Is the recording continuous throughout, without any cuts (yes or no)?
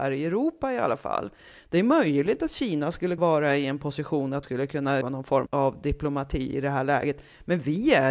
no